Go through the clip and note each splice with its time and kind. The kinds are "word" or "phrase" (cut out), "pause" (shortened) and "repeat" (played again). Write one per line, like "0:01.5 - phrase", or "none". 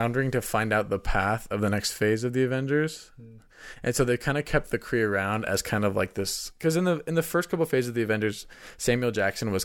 none

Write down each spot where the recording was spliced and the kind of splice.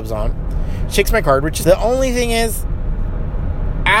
0:01.2 - word
0:01.6 - word

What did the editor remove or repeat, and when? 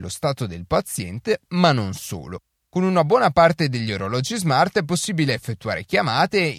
none

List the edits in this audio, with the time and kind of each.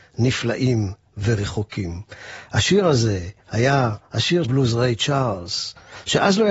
0:03.4 - pause
0:04.4 - phrase

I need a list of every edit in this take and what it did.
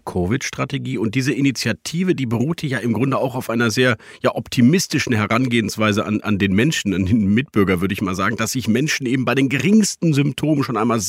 none

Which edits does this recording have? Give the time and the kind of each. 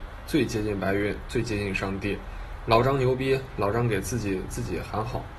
none

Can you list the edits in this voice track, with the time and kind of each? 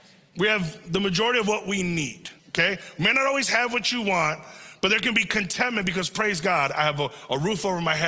0:02.4 - pause

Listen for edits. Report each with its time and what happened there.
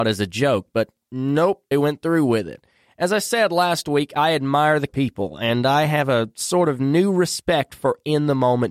0:01.7 - word
0:04.9 - phrase

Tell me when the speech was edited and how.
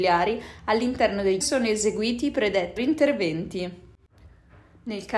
0:01.4 - phrase
0:02.8 - word

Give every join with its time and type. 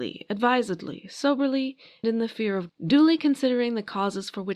0:02.0 - word
0:02.7 - word

